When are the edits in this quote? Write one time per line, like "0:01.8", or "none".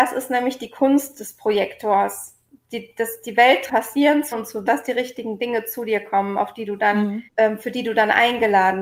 0:03.7
0:04.3
0:04.7
0:07.3